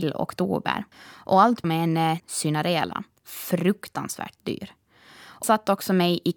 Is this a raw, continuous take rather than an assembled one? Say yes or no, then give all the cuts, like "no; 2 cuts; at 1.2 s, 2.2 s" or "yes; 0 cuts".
no; 4 cuts; at 0.9 s, 1.6 s, 2.2 s, 5.4 s